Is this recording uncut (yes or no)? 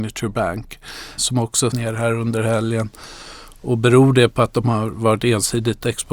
no